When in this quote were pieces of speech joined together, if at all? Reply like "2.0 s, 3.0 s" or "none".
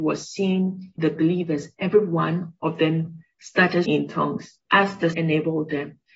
1.0 s, 3.8 s, 4.6 s, 5.1 s